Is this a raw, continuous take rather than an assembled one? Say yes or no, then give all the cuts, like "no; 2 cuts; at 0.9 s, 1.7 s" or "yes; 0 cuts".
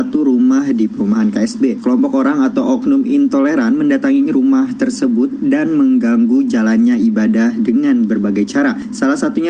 yes; 0 cuts